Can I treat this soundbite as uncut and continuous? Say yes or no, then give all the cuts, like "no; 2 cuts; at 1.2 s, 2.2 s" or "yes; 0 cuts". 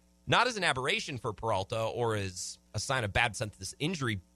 no; 2 cuts; at 2.7 s, 3.3 s